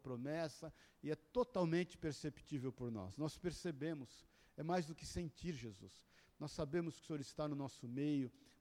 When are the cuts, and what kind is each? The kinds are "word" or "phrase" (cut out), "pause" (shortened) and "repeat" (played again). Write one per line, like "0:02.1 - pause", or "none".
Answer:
none